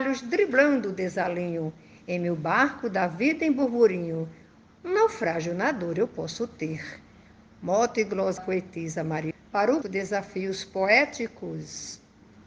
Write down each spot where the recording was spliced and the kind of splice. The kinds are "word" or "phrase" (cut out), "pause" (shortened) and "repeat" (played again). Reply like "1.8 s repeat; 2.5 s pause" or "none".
8.4 s word; 9.3 s word; 9.8 s word